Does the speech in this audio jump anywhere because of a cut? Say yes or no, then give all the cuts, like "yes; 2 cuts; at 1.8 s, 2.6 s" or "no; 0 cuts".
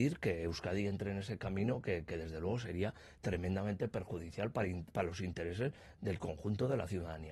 no; 0 cuts